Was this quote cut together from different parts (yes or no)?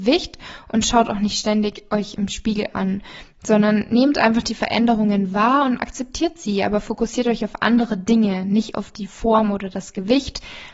no